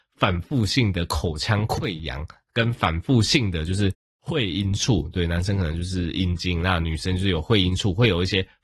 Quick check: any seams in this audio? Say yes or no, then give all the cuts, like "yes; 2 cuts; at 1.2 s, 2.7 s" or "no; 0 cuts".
no; 0 cuts